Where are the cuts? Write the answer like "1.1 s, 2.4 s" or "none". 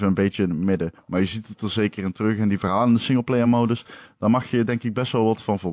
none